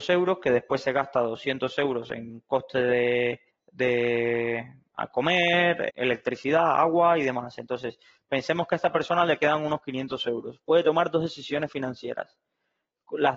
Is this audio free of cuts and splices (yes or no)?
no